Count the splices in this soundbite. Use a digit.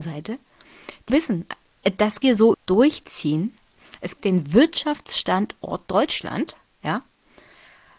5